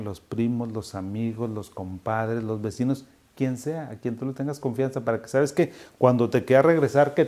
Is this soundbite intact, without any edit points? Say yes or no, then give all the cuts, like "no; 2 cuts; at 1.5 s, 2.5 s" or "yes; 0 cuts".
yes; 0 cuts